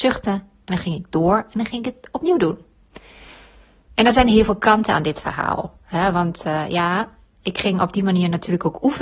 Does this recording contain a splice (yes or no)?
no